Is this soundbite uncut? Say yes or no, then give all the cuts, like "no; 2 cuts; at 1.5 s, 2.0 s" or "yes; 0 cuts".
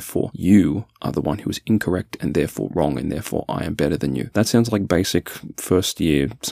yes; 0 cuts